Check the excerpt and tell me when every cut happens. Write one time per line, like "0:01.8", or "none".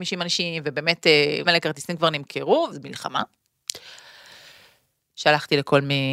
0:01.4
0:02.7